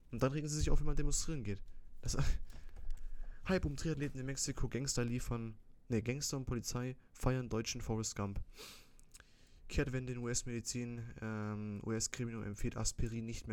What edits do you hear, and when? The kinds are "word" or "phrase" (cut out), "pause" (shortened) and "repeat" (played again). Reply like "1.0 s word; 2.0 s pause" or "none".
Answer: 5.0 s phrase